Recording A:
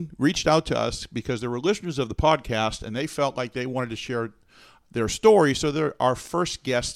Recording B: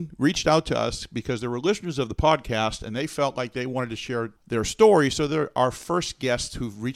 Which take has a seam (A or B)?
B